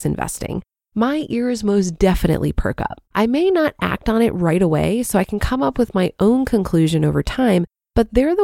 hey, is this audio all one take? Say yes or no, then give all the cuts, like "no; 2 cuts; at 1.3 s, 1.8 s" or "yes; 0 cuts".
no; 1 cut; at 3.1 s